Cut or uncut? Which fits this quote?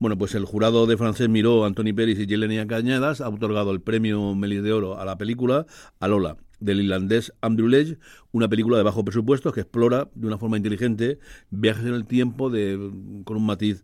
uncut